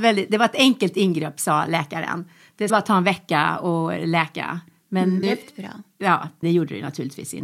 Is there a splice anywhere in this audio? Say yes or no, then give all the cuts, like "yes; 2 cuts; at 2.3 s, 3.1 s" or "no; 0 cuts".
yes; 3 cuts; at 2.7 s, 5.2 s, 6.4 s